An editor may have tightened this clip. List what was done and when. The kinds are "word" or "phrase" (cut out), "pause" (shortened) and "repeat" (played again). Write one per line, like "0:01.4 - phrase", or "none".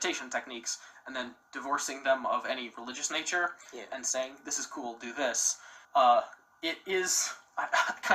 0:05.8 - pause